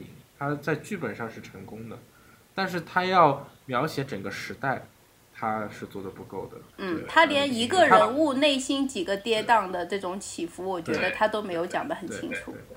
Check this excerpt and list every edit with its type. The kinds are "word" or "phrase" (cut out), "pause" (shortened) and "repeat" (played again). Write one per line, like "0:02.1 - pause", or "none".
0:06.7 - pause